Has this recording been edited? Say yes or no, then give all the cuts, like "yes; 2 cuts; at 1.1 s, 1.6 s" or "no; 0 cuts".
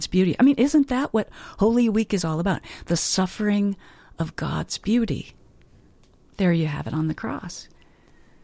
no; 0 cuts